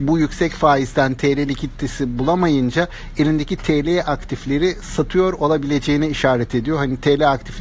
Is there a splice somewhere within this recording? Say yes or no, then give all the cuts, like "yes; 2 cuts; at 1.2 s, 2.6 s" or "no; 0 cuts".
no; 0 cuts